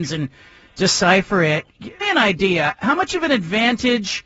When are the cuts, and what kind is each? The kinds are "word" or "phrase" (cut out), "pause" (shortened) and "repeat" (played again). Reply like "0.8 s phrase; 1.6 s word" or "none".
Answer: 2.0 s word